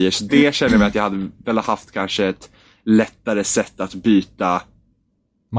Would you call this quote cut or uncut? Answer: uncut